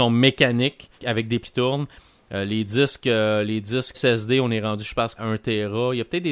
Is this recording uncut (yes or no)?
no